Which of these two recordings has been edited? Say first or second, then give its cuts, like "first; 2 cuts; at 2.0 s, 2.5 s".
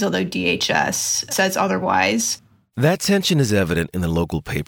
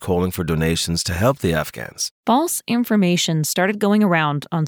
second; 1 cut; at 2.2 s